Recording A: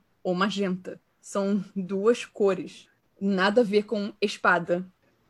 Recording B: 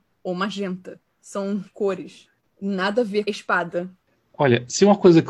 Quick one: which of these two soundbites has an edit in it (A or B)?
B